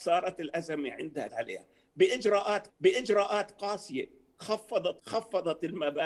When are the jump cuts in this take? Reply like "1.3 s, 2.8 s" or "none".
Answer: 1.3 s, 2.7 s, 5.0 s